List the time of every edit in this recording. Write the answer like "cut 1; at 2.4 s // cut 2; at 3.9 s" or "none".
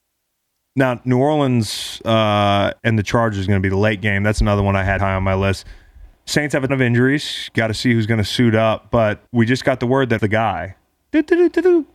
cut 1; at 2.8 s // cut 2; at 5.0 s // cut 3; at 6.7 s // cut 4; at 9.3 s // cut 5; at 10.2 s